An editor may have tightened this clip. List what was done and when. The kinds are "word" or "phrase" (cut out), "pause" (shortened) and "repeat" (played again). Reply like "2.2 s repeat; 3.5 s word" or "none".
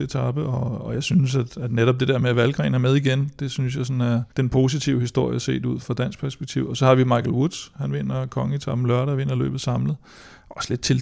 4.3 s pause; 5.8 s word